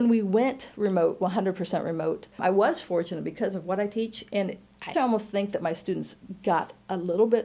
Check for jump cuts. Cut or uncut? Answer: cut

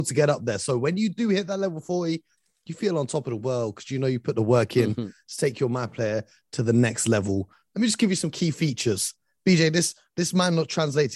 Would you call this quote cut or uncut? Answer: uncut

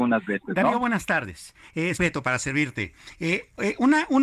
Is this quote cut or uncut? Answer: cut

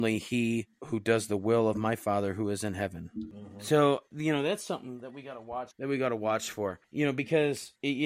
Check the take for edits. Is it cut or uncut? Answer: uncut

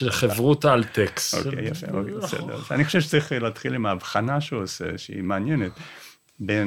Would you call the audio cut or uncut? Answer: uncut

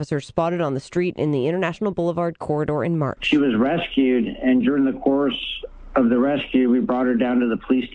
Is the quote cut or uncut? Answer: uncut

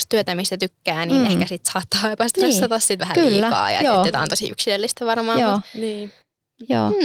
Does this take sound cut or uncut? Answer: cut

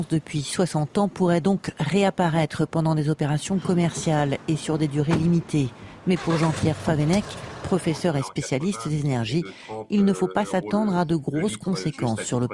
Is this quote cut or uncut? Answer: uncut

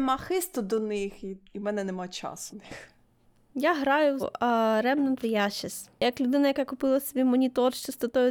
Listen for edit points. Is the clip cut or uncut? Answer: cut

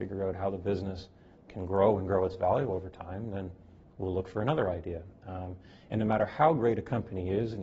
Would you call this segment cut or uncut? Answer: uncut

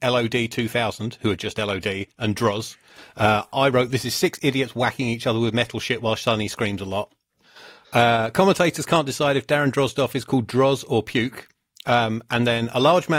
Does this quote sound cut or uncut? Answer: uncut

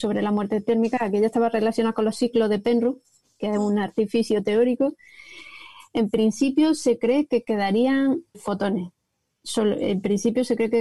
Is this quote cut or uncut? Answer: cut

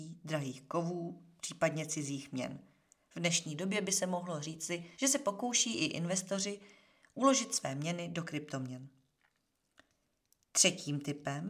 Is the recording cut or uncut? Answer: cut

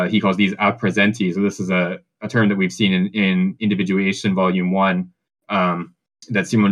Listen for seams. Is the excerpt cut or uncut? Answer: uncut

